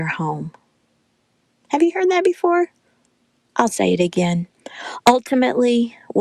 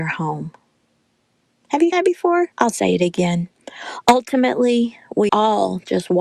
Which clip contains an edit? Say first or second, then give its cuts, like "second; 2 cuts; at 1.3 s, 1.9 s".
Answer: second; 3 cuts; at 1.9 s, 2.5 s, 5.3 s